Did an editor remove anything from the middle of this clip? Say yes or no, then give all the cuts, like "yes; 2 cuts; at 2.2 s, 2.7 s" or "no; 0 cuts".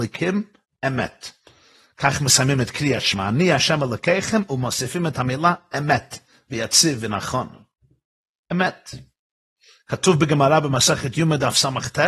no; 0 cuts